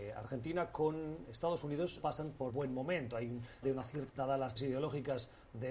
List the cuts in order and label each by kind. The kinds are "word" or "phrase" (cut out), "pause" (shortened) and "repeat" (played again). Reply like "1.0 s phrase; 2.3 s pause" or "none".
2.0 s word; 2.5 s word; 3.6 s word; 4.1 s word; 4.6 s word